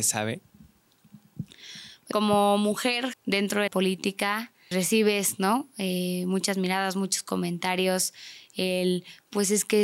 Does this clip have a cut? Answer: yes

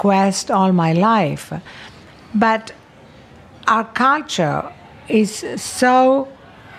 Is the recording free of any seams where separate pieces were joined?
yes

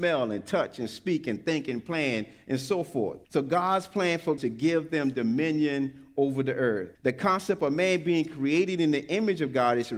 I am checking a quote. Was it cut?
yes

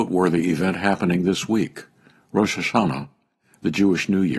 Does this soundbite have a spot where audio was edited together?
no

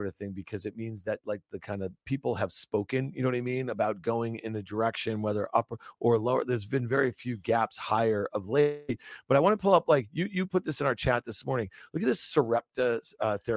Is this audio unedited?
yes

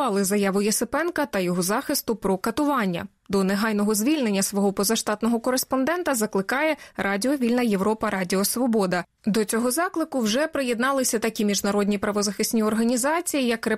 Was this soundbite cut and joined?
no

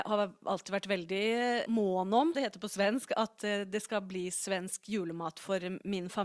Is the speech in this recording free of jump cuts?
no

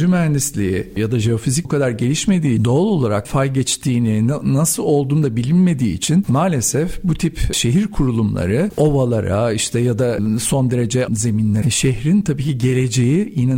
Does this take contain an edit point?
yes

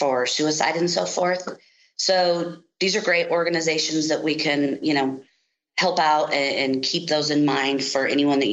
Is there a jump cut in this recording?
no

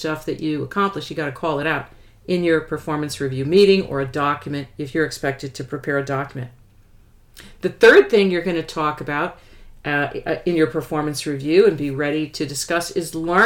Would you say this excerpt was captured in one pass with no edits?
yes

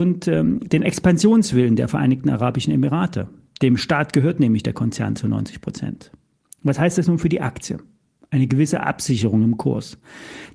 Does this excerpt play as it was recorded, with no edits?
yes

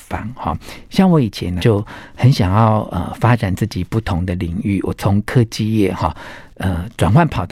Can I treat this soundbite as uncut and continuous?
no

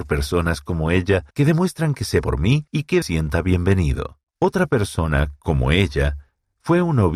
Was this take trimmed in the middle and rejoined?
yes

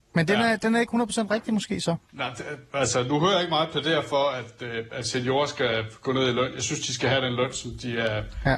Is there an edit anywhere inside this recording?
yes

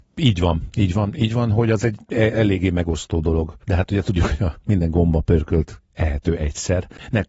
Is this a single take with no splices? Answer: no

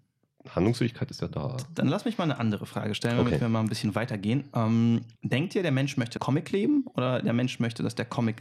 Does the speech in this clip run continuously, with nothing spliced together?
no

